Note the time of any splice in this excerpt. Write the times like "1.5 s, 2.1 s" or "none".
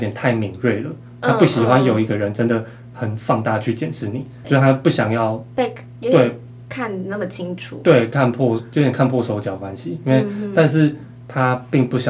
4.4 s